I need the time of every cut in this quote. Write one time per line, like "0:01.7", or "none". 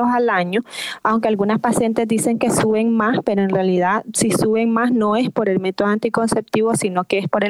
none